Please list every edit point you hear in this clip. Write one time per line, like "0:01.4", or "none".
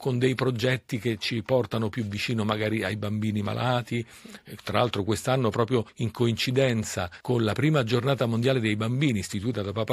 0:05.9
0:07.2

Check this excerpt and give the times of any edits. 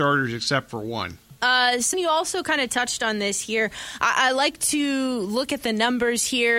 0:01.4
0:01.9

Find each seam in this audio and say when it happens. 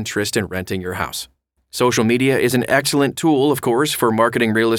none

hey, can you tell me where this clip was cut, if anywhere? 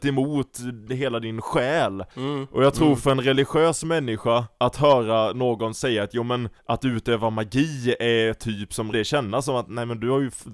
0:02.1
0:04.5
0:06.6
0:08.9

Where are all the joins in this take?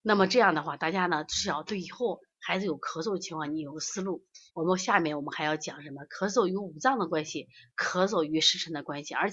0:04.5

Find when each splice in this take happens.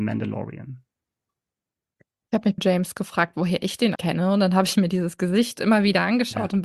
0:02.6
0:03.9

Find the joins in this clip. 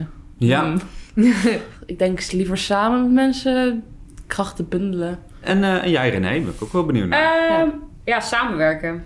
none

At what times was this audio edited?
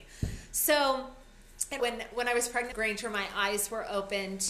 0:01.8
0:02.7

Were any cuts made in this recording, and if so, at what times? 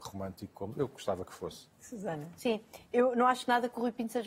0:01.7

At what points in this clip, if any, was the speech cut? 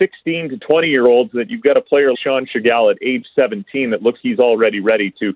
0:02.1
0:04.2

